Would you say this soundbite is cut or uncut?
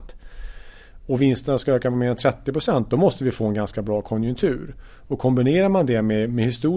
uncut